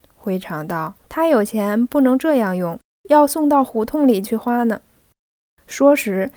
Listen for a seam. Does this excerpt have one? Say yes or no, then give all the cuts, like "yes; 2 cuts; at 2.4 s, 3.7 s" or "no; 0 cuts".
yes; 1 cut; at 1.0 s